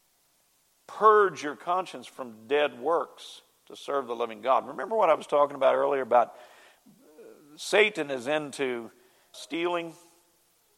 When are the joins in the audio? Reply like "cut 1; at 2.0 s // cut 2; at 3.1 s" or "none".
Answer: cut 1; at 9.3 s

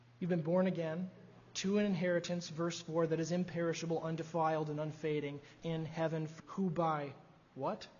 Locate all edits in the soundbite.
cut 1; at 5.6 s // cut 2; at 6.4 s

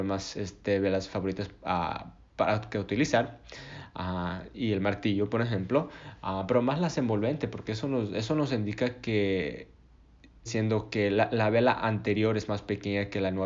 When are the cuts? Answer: cut 1; at 10.5 s

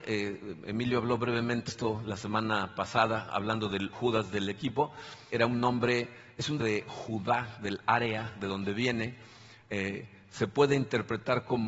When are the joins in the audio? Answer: cut 1; at 1.7 s // cut 2; at 3.9 s // cut 3; at 5.3 s // cut 4; at 6.6 s

